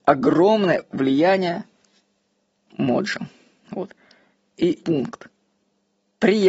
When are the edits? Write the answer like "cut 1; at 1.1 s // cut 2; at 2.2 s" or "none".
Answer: cut 1; at 2.7 s // cut 2; at 4.8 s